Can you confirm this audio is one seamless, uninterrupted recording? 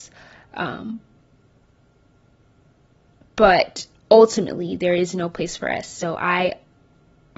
yes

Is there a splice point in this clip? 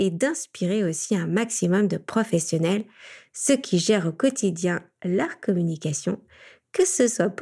no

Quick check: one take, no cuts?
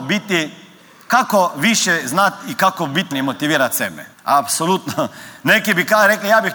no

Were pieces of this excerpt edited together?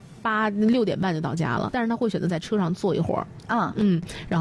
yes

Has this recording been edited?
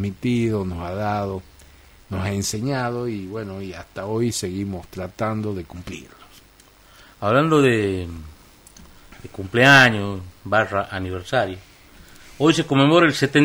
no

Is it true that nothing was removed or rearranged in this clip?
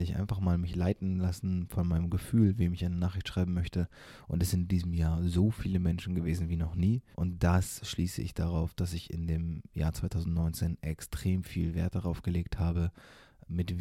no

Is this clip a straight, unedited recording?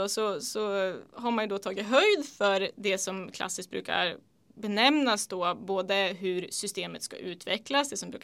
yes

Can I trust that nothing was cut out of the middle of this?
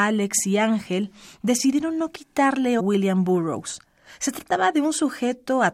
no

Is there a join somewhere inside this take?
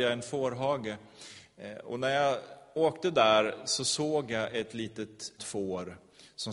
yes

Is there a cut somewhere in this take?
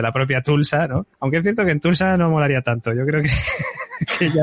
yes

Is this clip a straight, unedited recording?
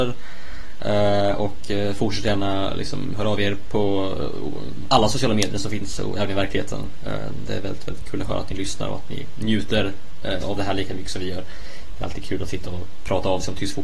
yes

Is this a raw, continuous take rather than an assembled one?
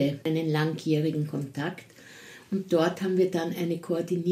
yes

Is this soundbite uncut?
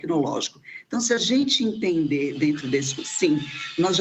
no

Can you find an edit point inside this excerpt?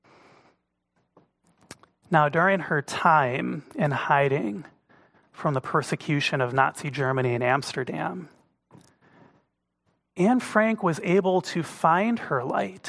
no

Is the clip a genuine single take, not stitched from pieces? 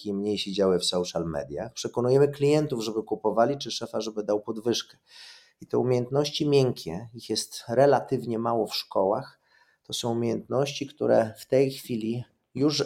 yes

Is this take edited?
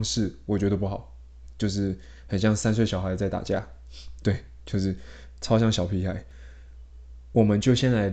no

